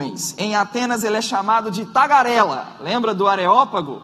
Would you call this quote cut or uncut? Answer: uncut